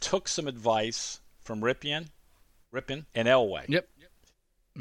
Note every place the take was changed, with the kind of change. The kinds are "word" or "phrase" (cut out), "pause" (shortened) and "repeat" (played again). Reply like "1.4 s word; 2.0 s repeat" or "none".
3.1 s pause

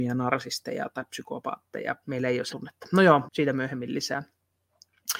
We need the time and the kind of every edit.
2.0 s word; 2.5 s word; 3.2 s word

